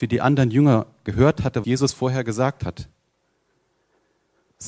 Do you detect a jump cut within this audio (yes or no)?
yes